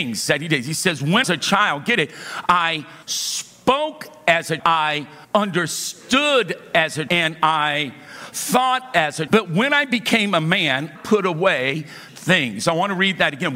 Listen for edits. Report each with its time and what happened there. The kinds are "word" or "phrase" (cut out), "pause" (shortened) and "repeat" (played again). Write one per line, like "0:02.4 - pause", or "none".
0:01.2 - phrase
0:03.0 - pause
0:04.6 - word
0:05.2 - pause
0:07.1 - word
0:09.3 - word
0:11.0 - word
0:12.1 - word